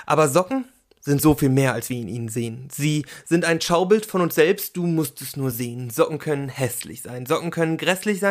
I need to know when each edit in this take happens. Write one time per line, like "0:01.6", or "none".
none